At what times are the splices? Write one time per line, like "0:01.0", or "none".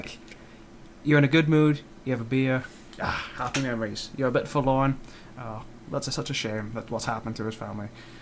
none